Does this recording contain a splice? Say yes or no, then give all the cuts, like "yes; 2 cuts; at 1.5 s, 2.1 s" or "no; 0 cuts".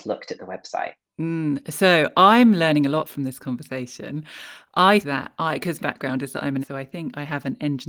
yes; 3 cuts; at 5.0 s, 5.8 s, 6.6 s